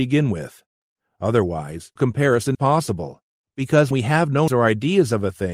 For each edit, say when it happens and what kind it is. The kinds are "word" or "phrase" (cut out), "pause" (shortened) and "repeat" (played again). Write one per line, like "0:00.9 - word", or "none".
0:02.0 - word
0:02.5 - word
0:03.9 - word
0:04.5 - word